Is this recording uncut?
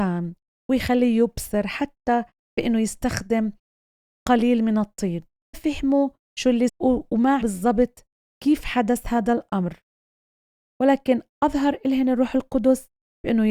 no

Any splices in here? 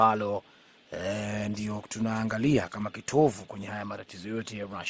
no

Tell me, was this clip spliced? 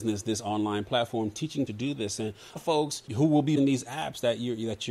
yes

